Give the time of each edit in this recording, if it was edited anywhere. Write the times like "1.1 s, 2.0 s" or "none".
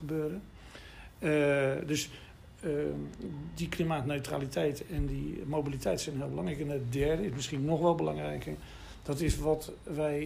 none